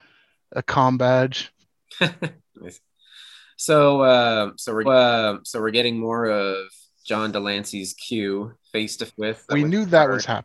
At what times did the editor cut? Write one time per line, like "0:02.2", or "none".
0:01.6
0:04.8
0:08.6
0:09.1
0:09.5

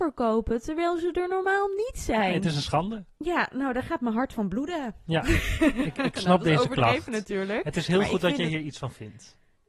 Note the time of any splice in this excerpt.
0:03.1

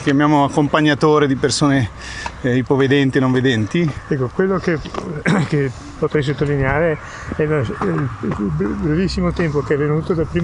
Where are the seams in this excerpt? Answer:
none

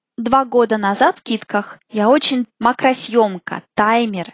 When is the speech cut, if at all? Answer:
0:01.2
0:01.8
0:02.4

